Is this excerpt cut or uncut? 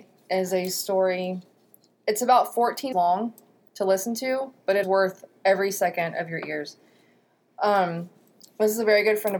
cut